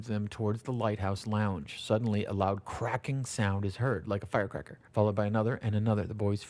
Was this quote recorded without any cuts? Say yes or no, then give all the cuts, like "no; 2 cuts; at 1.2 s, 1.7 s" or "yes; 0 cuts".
no; 1 cut; at 4.9 s